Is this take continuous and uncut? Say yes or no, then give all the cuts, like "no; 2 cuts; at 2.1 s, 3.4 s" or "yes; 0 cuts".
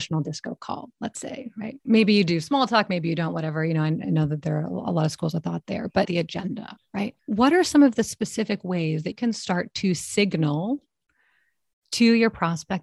no; 3 cuts; at 6.0 s, 7.2 s, 9.1 s